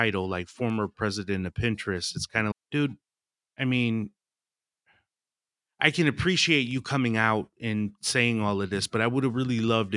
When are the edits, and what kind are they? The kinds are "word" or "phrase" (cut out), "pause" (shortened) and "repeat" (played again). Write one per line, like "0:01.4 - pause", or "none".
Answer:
0:02.5 - word